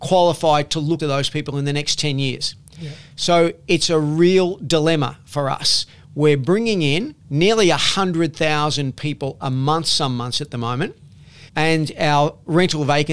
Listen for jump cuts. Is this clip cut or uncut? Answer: cut